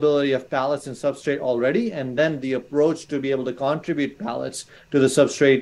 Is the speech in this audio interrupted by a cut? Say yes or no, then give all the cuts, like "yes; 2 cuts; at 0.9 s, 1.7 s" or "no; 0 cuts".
no; 0 cuts